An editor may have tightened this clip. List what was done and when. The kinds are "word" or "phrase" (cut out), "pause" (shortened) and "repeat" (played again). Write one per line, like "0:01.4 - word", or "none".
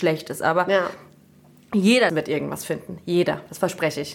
0:02.1 - phrase